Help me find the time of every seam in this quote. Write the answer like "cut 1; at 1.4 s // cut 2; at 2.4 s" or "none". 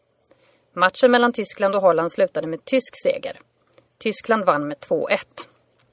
none

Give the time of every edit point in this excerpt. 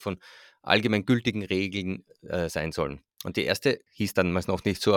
cut 1; at 3.1 s

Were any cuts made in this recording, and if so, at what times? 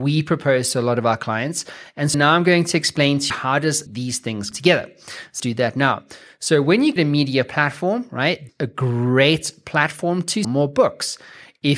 cut 1; at 2.1 s // cut 2; at 3.3 s // cut 3; at 3.9 s // cut 4; at 4.5 s // cut 5; at 5.4 s // cut 6; at 7.0 s // cut 7; at 8.5 s // cut 8; at 10.4 s

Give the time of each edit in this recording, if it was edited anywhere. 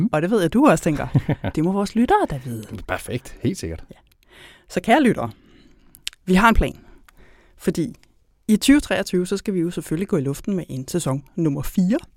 none

